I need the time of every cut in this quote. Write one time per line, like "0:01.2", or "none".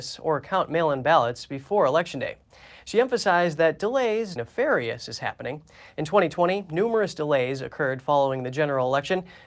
0:04.4